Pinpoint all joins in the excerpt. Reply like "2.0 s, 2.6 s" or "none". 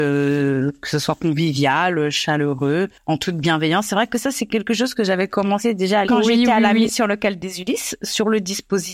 6.0 s